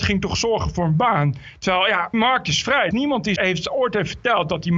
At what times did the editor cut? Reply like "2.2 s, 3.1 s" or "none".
2.1 s, 2.9 s, 3.4 s

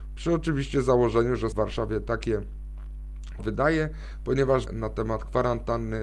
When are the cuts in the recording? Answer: 1.5 s, 3.4 s, 4.7 s

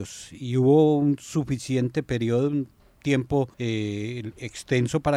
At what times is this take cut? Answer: 3.5 s

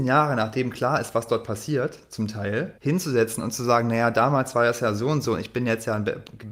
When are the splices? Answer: 2.8 s

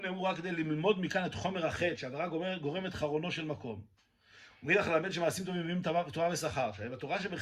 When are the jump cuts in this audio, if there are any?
none

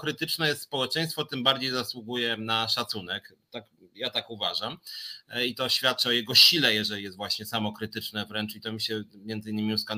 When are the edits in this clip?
none

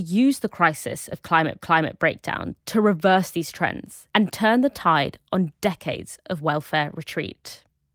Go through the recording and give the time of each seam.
1.6 s, 4.1 s

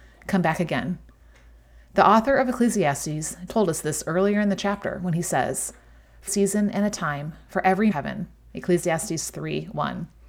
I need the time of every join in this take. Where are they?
3.5 s, 6.3 s, 7.9 s

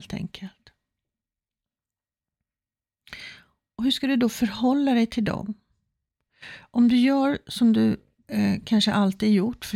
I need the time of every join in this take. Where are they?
none

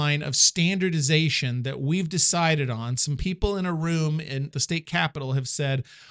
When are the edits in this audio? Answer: 4.5 s

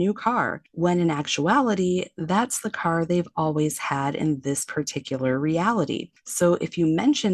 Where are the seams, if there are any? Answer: none

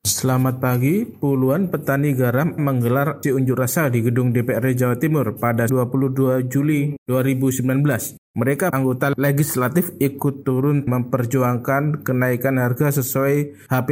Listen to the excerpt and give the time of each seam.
2.6 s, 3.2 s, 5.7 s, 8.7 s, 10.9 s

